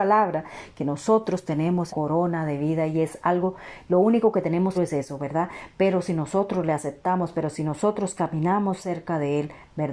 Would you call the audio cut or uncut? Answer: cut